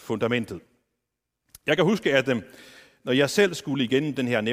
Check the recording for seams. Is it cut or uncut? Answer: uncut